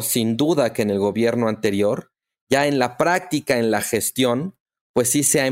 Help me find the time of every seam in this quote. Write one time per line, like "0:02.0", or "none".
none